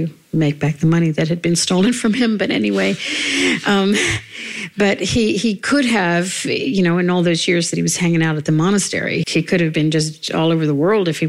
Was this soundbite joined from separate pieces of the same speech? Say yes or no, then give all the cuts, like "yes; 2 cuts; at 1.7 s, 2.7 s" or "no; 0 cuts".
yes; 1 cut; at 9.2 s